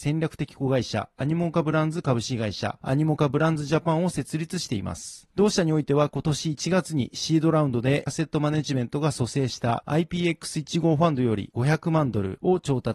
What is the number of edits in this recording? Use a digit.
1